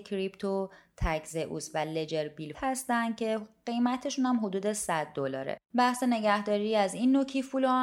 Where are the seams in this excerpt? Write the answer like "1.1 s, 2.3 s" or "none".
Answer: 2.5 s, 5.6 s

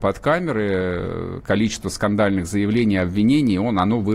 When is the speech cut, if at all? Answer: none

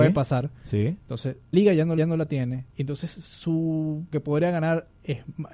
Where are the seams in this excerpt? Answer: 1.5 s, 2.0 s, 2.7 s, 4.1 s

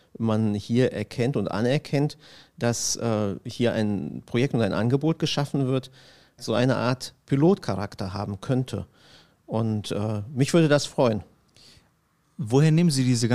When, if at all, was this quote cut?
6.4 s

